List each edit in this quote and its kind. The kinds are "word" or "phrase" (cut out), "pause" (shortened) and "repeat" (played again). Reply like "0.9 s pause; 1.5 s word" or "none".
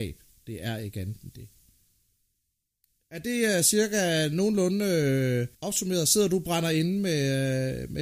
5.5 s pause